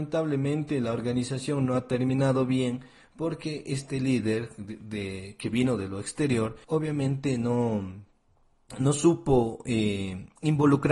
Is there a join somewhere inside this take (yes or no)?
yes